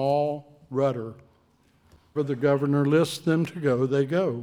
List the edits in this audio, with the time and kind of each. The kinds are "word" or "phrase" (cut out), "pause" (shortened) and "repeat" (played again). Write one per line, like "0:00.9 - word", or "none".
0:02.2 - word